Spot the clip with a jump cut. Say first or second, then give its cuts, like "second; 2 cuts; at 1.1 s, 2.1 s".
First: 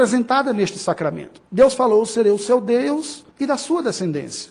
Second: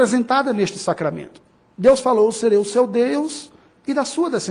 first; 2 cuts; at 1.5 s, 3.3 s